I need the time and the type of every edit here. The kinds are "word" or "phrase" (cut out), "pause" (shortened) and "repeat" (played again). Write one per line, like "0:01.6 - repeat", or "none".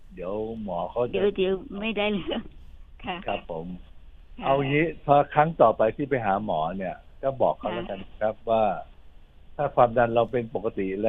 none